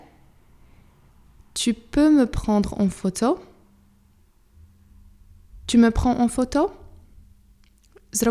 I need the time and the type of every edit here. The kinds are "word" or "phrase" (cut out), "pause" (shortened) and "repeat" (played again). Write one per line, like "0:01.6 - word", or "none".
none